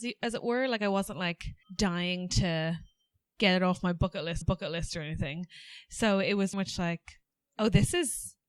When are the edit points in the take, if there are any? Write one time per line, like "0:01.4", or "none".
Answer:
0:01.6
0:04.4
0:06.5